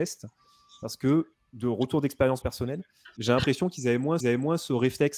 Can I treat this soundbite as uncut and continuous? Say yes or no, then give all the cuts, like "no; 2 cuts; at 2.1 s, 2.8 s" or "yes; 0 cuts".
no; 4 cuts; at 1.3 s, 2.4 s, 3.2 s, 4.2 s